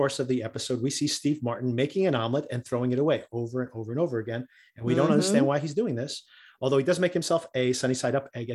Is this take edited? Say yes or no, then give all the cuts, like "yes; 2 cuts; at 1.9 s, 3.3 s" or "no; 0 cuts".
no; 0 cuts